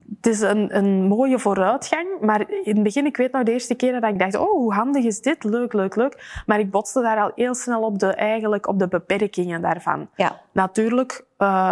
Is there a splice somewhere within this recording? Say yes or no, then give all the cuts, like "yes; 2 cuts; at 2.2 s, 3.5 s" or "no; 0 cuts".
yes; 1 cut; at 4.2 s